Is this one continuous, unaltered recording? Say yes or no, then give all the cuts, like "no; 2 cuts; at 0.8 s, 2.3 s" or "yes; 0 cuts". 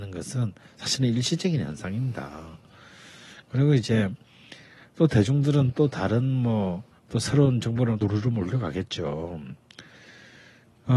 no; 2 cuts; at 7.0 s, 8.0 s